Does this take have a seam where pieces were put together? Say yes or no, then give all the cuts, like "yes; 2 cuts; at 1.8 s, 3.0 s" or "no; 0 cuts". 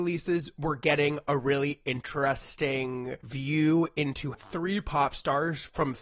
yes; 1 cut; at 4.3 s